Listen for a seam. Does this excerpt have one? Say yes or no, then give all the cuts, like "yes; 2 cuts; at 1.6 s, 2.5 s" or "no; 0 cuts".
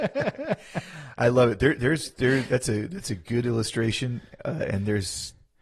no; 0 cuts